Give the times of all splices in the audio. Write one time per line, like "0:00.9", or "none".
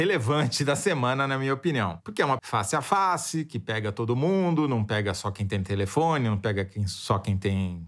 0:02.4